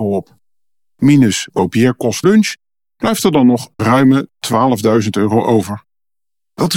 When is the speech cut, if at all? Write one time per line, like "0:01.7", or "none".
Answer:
0:01.5
0:02.2
0:03.8